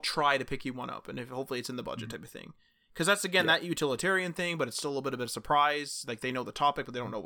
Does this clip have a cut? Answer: no; 0 cuts

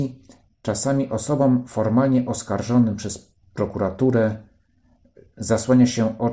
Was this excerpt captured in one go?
yes; 0 cuts

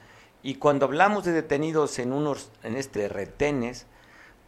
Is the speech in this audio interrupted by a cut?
yes; 1 cut; at 2.9 s

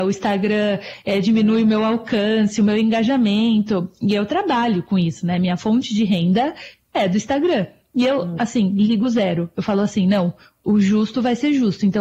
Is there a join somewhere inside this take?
no; 0 cuts

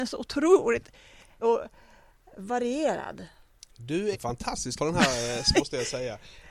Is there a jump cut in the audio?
yes; 4 cuts; at 1.4 s, 4.1 s, 4.8 s, 5.5 s

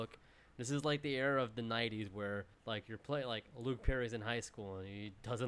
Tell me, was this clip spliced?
yes; 1 cut; at 2.5 s

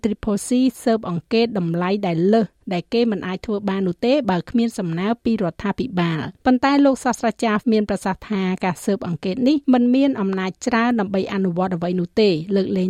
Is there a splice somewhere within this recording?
yes; 3 cuts; at 6.4 s, 7.6 s, 9.6 s

